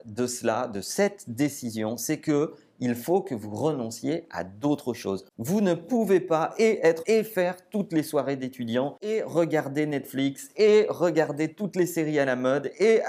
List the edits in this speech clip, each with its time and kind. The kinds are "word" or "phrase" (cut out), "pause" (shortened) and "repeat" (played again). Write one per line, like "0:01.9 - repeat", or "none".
0:07.0 - word

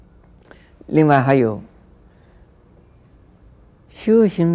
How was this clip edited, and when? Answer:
none

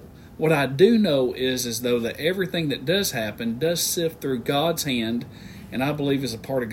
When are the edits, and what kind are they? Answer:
none

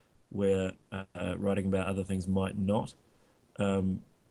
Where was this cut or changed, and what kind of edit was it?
none

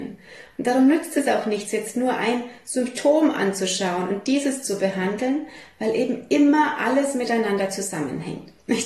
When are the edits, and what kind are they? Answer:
none

